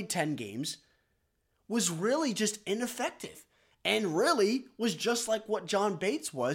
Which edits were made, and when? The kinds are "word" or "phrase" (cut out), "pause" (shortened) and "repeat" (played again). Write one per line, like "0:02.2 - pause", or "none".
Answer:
none